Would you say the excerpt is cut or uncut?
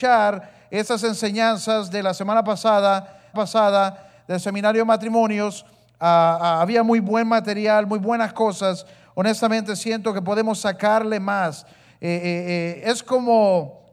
cut